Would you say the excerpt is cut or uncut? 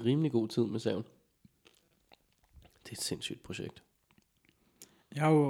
uncut